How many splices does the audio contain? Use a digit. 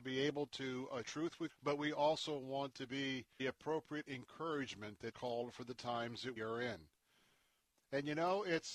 5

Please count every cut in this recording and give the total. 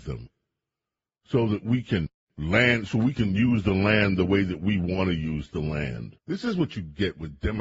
1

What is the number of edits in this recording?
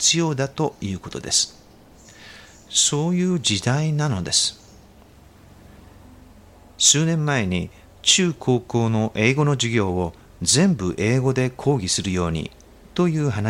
0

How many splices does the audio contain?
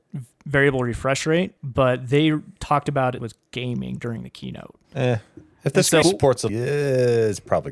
5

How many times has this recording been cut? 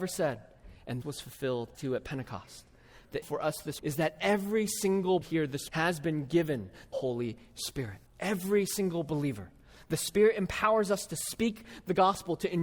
8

